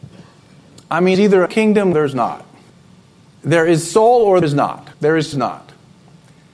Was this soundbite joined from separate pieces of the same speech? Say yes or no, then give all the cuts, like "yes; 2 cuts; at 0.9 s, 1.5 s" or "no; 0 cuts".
yes; 7 cuts; at 1.1 s, 1.5 s, 1.9 s, 2.7 s, 4.4 s, 4.9 s, 5.3 s